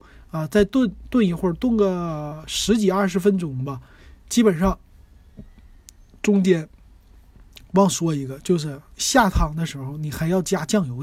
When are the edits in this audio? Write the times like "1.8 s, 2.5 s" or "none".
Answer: 8.9 s